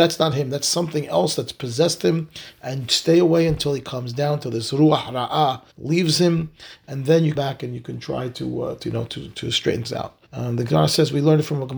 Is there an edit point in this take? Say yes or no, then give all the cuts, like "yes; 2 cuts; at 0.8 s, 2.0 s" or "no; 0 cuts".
yes; 4 cuts; at 5.7 s, 7.3 s, 9.8 s, 10.3 s